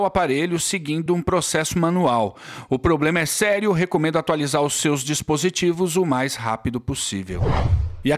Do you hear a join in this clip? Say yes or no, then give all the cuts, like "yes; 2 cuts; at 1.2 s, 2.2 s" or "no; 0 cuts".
no; 0 cuts